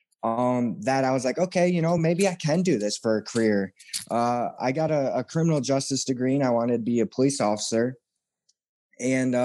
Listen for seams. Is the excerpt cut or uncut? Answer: uncut